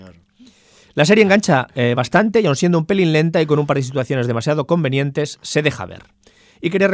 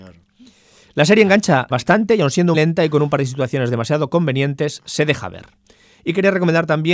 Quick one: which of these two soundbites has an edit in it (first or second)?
second